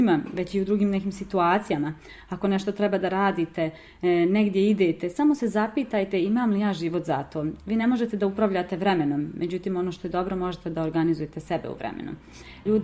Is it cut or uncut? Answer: uncut